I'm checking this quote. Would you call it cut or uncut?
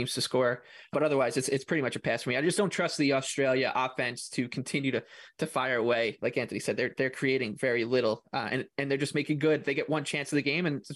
uncut